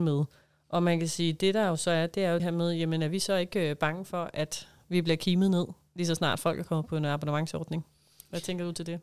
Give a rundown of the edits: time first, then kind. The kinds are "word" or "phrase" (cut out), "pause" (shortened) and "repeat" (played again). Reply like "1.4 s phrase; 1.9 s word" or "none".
2.4 s word